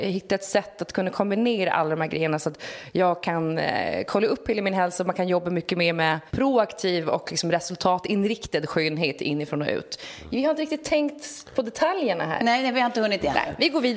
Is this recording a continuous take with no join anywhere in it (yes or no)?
no